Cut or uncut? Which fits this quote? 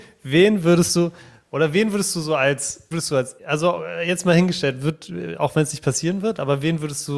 cut